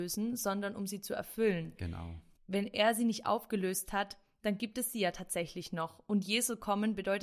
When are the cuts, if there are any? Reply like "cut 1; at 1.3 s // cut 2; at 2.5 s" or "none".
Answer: none